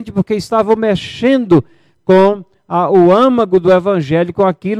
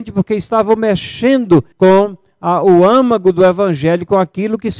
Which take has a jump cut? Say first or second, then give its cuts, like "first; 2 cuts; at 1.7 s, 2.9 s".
second; 1 cut; at 1.7 s